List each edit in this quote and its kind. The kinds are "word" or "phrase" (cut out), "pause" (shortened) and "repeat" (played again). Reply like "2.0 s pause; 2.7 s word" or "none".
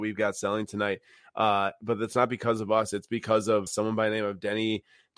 3.7 s word